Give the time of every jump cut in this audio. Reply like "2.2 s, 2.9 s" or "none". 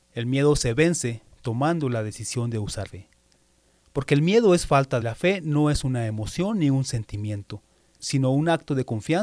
1.3 s, 2.9 s, 5.0 s, 8.0 s